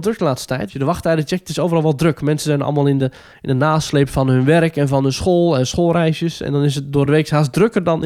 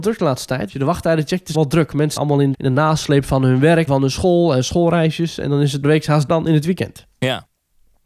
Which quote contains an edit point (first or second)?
second